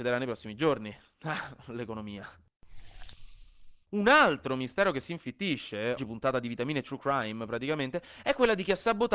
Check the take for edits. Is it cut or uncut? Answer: cut